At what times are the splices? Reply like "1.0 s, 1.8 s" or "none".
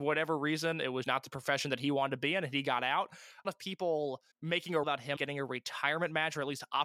1.0 s, 3.4 s, 4.3 s, 4.8 s, 5.2 s